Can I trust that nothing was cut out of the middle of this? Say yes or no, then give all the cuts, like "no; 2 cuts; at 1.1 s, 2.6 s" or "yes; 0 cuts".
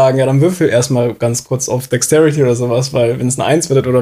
yes; 0 cuts